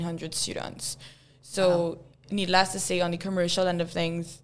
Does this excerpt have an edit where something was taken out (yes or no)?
no